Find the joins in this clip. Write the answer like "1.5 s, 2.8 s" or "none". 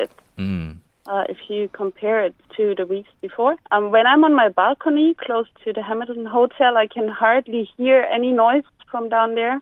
2.4 s, 3.6 s, 5.5 s